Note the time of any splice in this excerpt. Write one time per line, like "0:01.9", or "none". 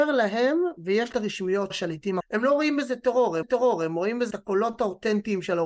0:01.1
0:01.7
0:02.2
0:03.4
0:04.3